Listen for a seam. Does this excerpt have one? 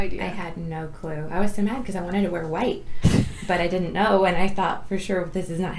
no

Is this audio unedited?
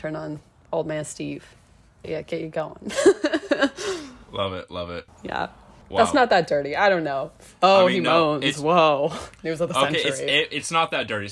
no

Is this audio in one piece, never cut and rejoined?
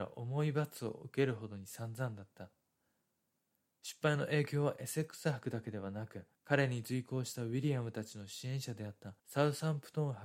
no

